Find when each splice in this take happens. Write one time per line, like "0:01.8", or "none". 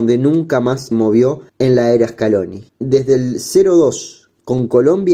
0:00.9
0:01.5
0:02.7